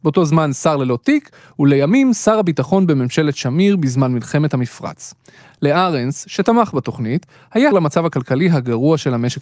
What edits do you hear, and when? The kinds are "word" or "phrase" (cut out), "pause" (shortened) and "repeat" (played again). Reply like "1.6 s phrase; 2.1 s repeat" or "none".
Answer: 7.7 s word